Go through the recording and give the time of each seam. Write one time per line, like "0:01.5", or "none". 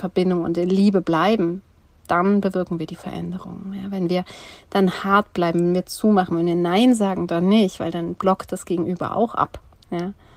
none